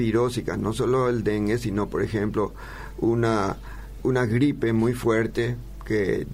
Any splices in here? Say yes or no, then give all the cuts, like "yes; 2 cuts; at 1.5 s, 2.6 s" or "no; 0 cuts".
yes; 1 cut; at 4.0 s